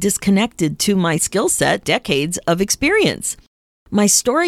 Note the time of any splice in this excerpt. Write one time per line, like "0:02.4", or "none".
0:01.2
0:01.8